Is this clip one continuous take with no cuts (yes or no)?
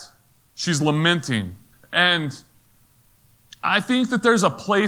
no